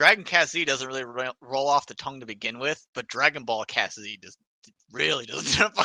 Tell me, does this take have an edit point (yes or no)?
no